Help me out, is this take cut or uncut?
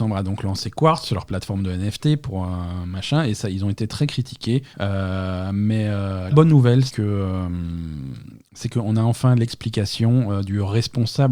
cut